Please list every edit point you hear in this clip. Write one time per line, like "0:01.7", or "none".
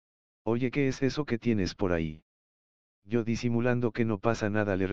none